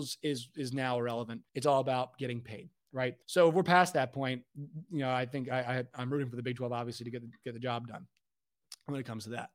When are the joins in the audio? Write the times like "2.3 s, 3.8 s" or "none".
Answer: 1.5 s, 3.2 s

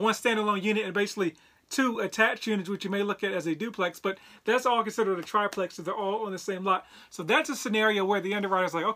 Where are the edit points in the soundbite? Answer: none

